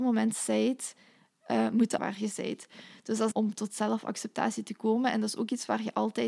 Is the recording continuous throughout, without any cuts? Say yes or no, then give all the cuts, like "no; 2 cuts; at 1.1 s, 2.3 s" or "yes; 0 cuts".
no; 2 cuts; at 2.0 s, 3.3 s